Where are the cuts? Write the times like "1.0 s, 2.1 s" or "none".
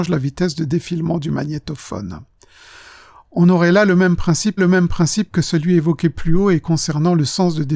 4.6 s